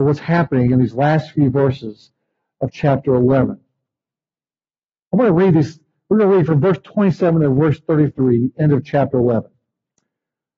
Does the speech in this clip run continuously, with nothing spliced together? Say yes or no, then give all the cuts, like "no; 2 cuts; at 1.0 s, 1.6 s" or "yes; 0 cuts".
yes; 0 cuts